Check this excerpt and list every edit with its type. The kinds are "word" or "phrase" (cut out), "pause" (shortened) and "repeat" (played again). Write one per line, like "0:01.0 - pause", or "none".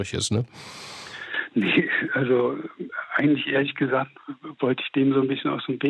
none